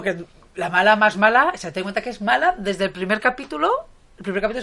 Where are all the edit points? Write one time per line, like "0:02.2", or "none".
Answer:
none